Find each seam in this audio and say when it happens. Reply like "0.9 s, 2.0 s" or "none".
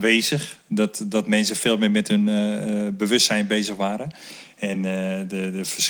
none